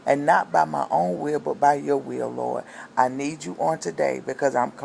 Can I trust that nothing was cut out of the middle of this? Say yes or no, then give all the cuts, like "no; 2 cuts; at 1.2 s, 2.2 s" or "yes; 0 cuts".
yes; 0 cuts